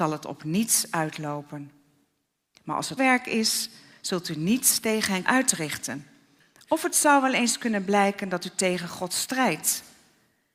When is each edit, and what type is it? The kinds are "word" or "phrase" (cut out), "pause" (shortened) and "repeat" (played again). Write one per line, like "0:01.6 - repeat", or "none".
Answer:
0:03.0 - word
0:05.3 - word